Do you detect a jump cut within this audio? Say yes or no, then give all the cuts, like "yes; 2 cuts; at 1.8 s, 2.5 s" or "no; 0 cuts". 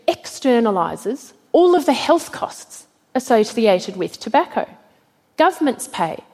no; 0 cuts